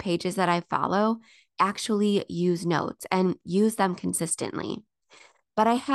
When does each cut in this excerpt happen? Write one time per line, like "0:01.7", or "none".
none